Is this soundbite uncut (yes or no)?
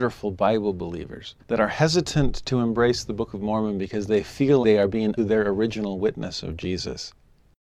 no